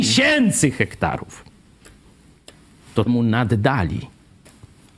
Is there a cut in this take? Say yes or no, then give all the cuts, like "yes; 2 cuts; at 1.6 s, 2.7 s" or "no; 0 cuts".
yes; 1 cut; at 3.1 s